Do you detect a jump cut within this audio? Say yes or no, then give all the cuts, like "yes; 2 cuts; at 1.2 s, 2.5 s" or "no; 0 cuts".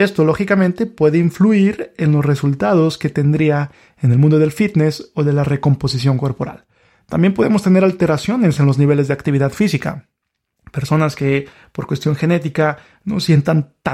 no; 0 cuts